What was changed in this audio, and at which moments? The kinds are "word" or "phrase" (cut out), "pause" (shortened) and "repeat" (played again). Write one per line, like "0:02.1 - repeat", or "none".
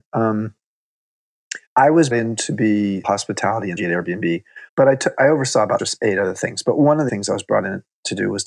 0:01.7 - pause
0:02.1 - word
0:03.0 - phrase
0:03.8 - word
0:04.7 - pause
0:05.8 - word
0:07.1 - word